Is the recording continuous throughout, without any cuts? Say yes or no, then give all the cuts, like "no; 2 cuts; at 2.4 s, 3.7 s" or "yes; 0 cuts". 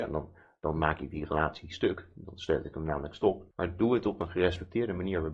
no; 1 cut; at 3.5 s